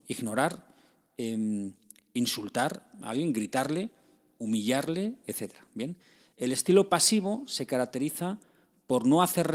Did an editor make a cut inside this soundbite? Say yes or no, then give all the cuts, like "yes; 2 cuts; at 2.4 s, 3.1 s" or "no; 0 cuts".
no; 0 cuts